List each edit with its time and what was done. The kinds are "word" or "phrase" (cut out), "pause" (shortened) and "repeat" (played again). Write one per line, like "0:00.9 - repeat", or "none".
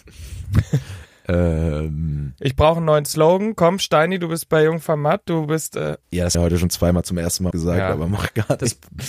0:06.0 - word
0:06.3 - word
0:07.5 - word